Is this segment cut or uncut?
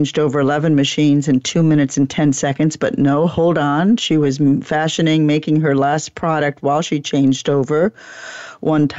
uncut